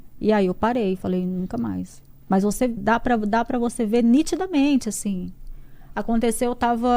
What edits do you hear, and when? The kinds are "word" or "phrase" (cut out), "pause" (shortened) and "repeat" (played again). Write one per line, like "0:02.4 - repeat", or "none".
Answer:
0:02.8 - word